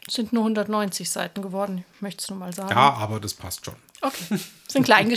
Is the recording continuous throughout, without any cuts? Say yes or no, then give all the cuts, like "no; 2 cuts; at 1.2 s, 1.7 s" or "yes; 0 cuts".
yes; 0 cuts